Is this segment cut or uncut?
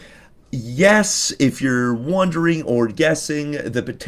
uncut